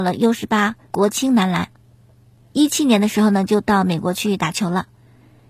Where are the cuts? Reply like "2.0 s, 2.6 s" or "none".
none